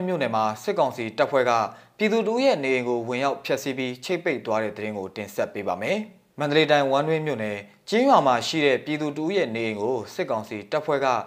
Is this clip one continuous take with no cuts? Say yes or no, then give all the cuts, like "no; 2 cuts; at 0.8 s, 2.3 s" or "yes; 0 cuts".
no; 1 cut; at 6.3 s